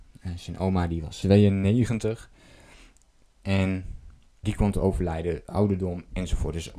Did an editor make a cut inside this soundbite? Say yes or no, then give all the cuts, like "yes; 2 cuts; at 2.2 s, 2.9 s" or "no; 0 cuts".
yes; 2 cuts; at 1.2 s, 4.4 s